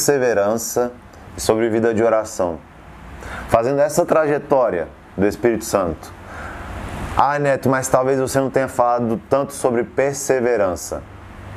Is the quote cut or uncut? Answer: uncut